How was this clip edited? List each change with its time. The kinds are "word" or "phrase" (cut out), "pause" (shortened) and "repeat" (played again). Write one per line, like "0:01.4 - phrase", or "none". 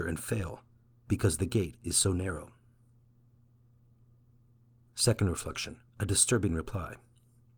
0:05.9 - pause